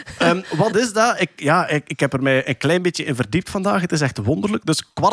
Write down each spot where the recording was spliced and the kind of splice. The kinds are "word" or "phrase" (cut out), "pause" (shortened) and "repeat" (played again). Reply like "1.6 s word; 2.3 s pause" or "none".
none

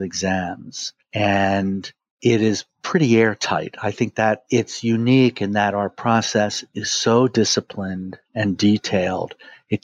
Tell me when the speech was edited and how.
none

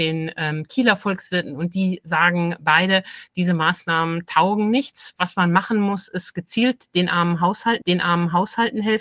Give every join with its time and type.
7.8 s repeat

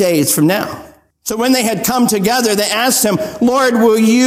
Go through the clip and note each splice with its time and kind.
1.1 s pause

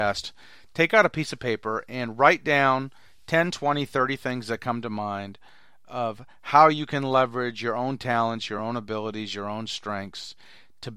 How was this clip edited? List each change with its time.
none

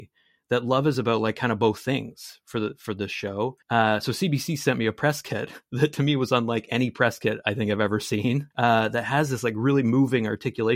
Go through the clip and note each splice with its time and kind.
3.6 s pause; 8.5 s pause

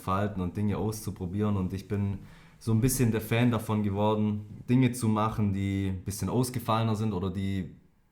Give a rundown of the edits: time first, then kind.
none

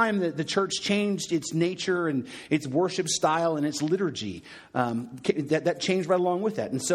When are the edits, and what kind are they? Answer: none

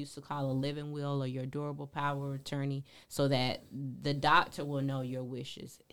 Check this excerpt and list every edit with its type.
none

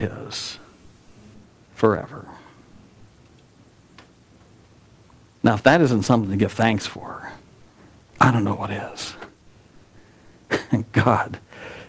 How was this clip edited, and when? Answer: none

